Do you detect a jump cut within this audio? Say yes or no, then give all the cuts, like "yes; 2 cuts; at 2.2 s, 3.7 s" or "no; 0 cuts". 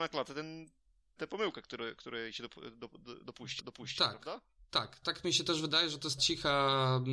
yes; 4 cuts; at 1.2 s, 3.6 s, 5.0 s, 6.2 s